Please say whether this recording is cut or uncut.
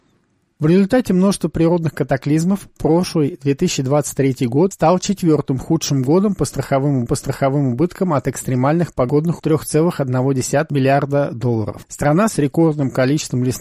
cut